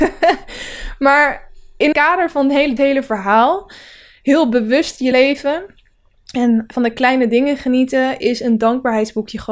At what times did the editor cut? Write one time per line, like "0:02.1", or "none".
0:01.9
0:02.8
0:05.1
0:06.7